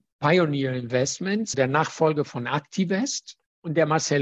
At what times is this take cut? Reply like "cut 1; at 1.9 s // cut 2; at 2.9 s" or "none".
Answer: cut 1; at 1.5 s